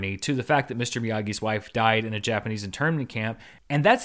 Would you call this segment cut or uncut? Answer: uncut